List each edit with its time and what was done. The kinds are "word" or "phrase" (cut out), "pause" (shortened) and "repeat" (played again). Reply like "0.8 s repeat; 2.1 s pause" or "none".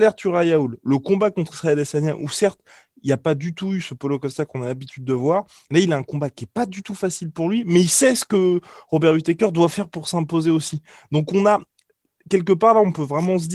none